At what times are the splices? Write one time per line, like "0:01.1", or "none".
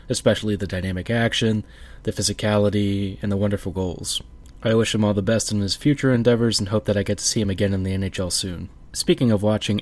none